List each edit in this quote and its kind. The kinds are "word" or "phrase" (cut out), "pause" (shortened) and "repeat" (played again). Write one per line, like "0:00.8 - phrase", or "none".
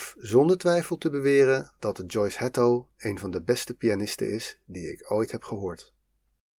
none